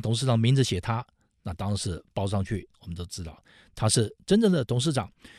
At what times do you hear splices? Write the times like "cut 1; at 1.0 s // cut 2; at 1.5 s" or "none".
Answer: none